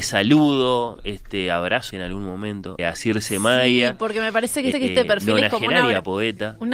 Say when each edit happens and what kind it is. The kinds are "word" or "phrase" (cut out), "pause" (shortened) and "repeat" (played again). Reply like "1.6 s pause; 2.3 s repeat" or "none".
1.9 s word; 2.8 s word; 4.7 s repeat